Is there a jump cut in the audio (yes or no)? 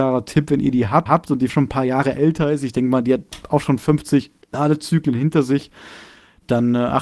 yes